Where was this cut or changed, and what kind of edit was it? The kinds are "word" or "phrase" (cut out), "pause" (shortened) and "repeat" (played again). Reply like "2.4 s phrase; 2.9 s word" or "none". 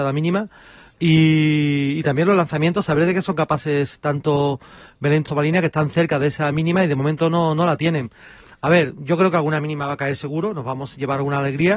5.3 s phrase

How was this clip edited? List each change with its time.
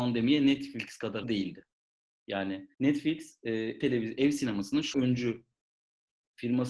1.2 s word; 2.7 s pause; 3.8 s word; 4.9 s word

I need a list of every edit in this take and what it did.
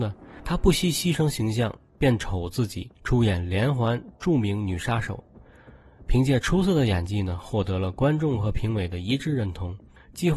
2.9 s pause

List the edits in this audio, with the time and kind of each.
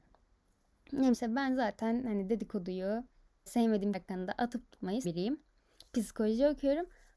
1.1 s word; 3.5 s word; 3.9 s word; 5.0 s word

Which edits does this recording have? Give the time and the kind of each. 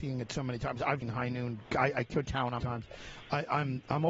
1.0 s word; 2.2 s word; 2.6 s word

